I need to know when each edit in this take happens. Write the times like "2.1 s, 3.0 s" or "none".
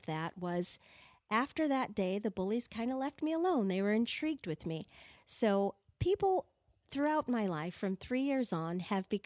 none